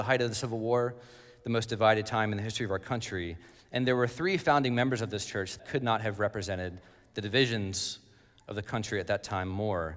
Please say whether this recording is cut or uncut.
cut